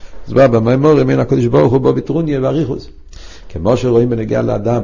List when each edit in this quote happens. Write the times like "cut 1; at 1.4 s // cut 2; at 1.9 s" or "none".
none